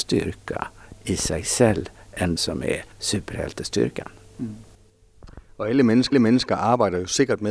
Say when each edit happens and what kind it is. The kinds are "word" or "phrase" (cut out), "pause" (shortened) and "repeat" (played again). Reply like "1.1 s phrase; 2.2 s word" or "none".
2.4 s word; 2.9 s pause; 6.1 s repeat